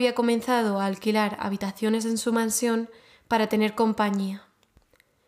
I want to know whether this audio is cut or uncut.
uncut